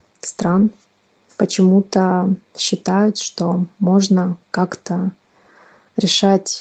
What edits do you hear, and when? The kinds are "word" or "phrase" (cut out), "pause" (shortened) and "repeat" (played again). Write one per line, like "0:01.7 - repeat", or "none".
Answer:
0:04.4 - pause